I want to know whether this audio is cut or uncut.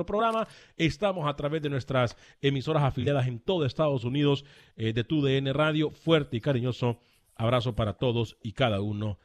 uncut